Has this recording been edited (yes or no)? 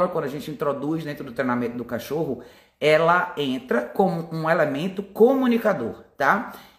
no